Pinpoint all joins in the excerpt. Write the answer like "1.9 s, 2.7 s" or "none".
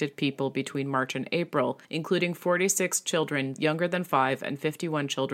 1.8 s

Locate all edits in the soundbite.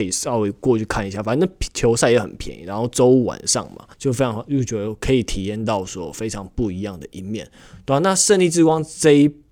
3.9 s

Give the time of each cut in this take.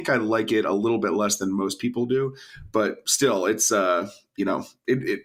none

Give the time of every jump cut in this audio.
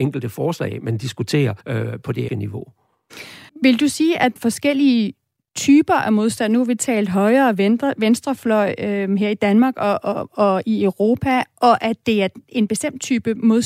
1.6 s, 2.3 s, 3.5 s, 4.4 s

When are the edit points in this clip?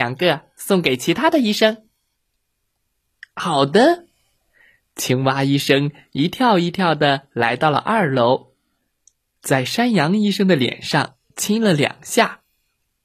11.2 s

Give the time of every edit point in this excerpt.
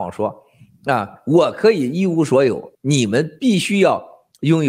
2.7 s

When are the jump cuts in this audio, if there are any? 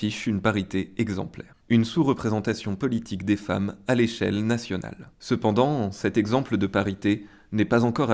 1.6 s, 5.1 s

